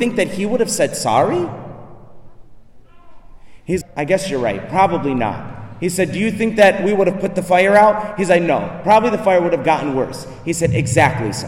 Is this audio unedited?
no; 1 cut; at 3.8 s

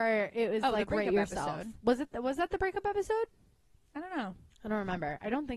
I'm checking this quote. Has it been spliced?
no; 0 cuts

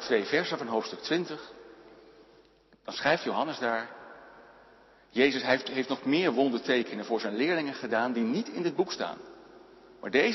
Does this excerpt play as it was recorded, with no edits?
yes; 0 cuts

